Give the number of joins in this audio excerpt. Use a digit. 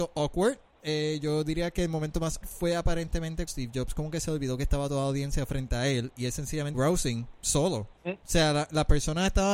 3